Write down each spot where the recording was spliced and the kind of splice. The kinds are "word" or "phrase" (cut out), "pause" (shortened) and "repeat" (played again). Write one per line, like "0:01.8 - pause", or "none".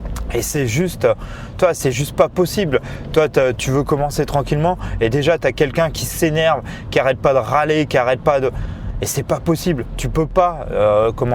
none